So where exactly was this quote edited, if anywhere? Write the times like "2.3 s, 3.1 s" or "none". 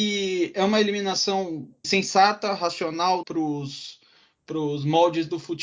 1.8 s, 3.2 s